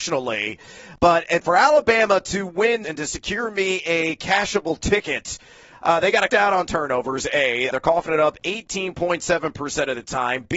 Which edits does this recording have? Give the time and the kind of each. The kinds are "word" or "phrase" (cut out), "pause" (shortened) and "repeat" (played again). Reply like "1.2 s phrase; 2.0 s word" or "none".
2.8 s word; 6.3 s word; 7.7 s word